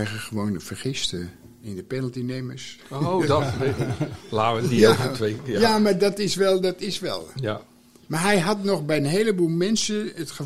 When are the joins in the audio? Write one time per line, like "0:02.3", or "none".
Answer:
none